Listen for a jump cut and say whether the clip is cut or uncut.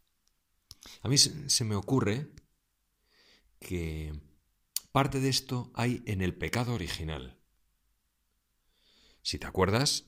uncut